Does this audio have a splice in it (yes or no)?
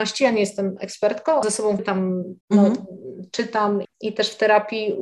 yes